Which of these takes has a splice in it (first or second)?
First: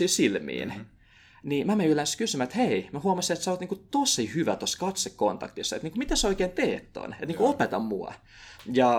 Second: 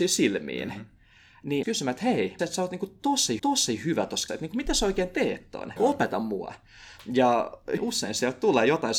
second